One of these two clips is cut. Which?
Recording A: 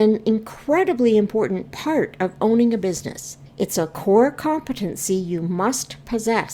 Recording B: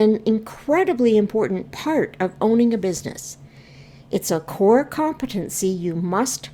A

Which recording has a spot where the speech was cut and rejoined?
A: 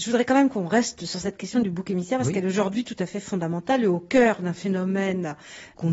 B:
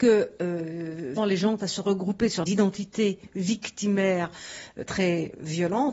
B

